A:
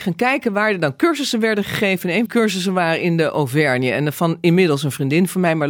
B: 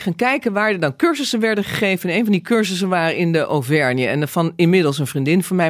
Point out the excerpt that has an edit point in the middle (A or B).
A